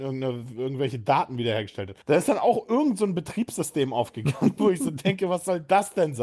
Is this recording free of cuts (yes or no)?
no